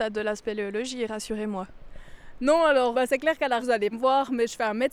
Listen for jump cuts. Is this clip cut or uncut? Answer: cut